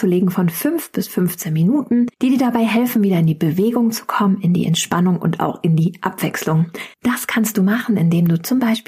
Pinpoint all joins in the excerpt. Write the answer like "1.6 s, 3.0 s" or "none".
2.1 s, 6.9 s